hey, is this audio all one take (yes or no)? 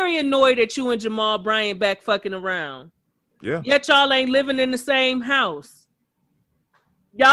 yes